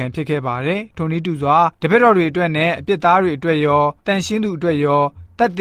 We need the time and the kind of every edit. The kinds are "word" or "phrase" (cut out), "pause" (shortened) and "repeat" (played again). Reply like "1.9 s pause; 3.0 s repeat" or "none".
1.7 s pause; 4.0 s pause